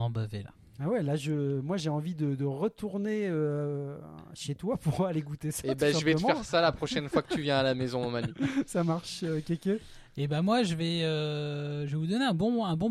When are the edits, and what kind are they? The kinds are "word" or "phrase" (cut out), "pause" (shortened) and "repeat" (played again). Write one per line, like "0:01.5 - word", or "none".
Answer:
none